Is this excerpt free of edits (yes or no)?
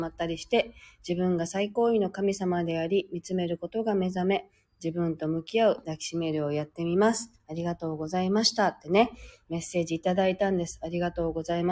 yes